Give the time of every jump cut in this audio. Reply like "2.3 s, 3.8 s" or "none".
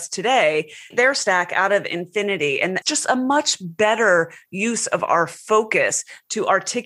0.9 s, 2.8 s